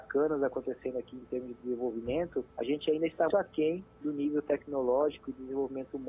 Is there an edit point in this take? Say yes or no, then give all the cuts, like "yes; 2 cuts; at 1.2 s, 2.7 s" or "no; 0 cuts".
yes; 2 cuts; at 2.5 s, 3.3 s